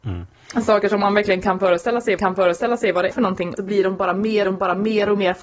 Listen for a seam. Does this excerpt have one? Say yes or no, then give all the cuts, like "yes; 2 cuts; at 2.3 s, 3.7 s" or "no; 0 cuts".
yes; 4 cuts; at 2.2 s, 3.1 s, 3.6 s, 4.4 s